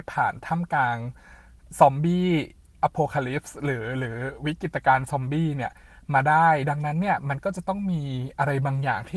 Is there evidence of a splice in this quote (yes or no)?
no